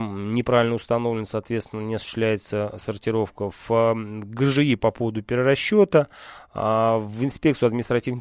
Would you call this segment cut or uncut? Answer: uncut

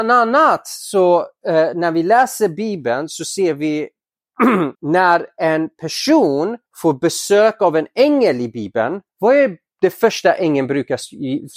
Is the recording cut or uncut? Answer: cut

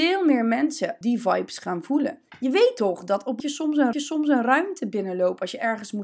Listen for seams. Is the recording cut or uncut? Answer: cut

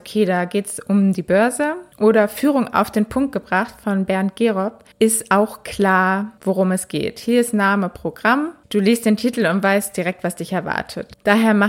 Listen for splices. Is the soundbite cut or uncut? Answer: cut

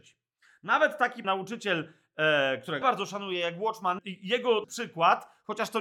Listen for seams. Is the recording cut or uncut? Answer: cut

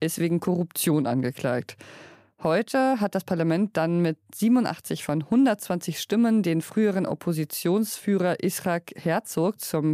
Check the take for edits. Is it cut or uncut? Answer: uncut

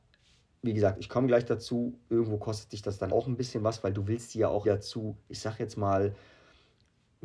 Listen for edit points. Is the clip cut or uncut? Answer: cut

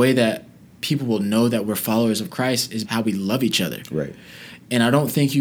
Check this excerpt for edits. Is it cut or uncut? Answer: cut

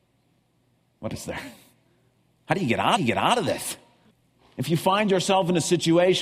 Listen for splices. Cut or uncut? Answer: cut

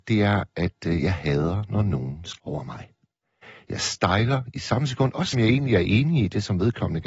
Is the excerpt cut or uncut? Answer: cut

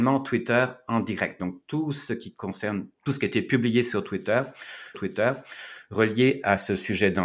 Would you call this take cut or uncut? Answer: cut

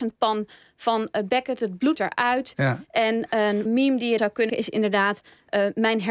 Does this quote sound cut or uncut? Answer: cut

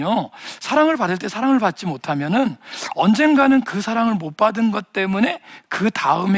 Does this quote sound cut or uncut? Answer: uncut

